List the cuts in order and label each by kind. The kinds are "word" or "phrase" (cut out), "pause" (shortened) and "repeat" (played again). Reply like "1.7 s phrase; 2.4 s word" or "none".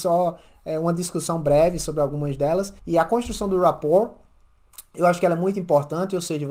2.8 s pause

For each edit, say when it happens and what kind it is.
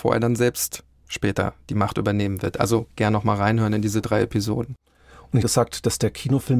5.4 s phrase

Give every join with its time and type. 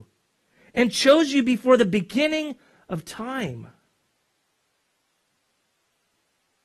none

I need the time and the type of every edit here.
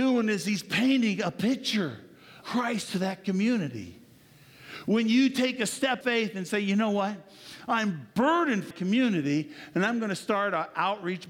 2.4 s word; 6.0 s word; 8.7 s word

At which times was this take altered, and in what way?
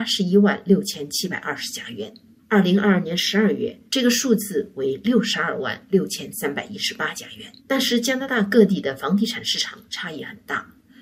2.4 s pause; 3.9 s pause; 7.6 s pause

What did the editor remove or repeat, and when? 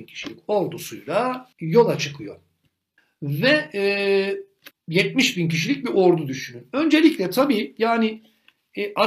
1.5 s pause; 3.0 s pause; 4.7 s pause

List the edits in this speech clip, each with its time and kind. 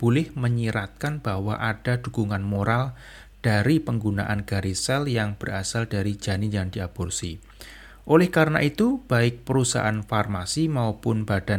none

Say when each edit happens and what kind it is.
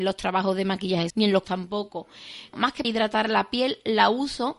1.1 s word; 1.4 s word; 2.5 s word; 2.8 s word

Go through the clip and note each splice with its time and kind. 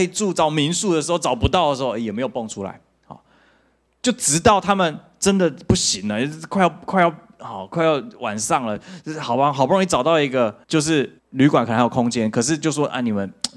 10.6 s pause; 11.2 s pause

